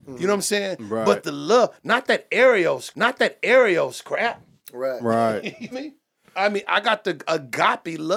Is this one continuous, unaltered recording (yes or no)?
no